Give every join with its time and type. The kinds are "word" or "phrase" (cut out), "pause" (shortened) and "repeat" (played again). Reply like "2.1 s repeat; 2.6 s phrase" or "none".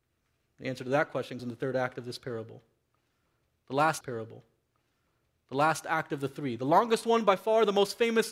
1.4 s word; 4.0 s repeat